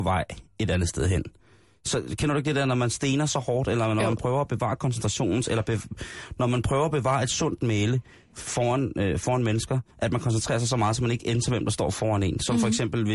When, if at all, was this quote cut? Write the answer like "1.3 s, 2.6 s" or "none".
9.9 s